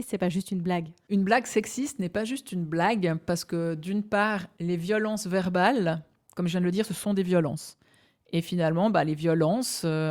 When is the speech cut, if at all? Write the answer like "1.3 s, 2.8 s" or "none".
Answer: none